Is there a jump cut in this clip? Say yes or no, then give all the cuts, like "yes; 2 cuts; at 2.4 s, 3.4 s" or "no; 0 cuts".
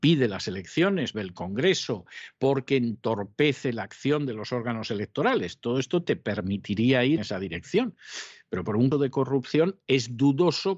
yes; 3 cuts; at 1.1 s, 7.2 s, 8.9 s